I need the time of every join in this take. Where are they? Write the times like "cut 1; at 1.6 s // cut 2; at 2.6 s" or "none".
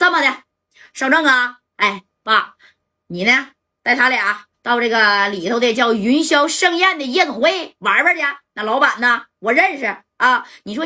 cut 1; at 1.7 s // cut 2; at 4.5 s